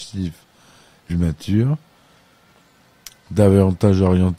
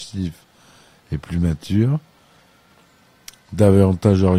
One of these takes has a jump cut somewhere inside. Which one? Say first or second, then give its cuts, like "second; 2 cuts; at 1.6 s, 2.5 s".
first; 1 cut; at 1.1 s